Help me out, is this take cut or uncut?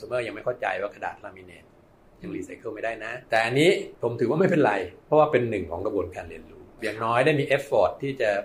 cut